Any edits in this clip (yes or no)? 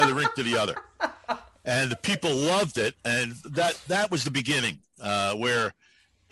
no